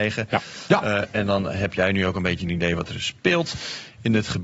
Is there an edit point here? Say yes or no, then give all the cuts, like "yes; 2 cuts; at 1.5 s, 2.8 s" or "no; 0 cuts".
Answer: no; 0 cuts